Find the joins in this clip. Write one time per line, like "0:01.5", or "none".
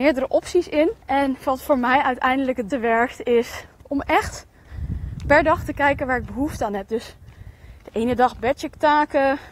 0:01.0
0:02.7